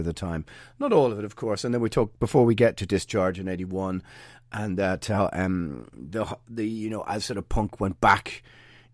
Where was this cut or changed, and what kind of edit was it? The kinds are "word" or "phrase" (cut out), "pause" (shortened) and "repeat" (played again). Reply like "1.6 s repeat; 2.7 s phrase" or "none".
none